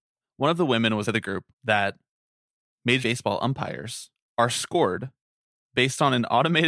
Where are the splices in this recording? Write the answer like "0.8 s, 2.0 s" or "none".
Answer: 1.1 s, 1.5 s, 3.0 s, 4.1 s